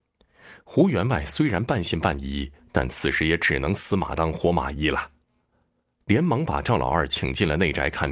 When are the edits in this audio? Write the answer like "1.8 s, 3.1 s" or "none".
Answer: none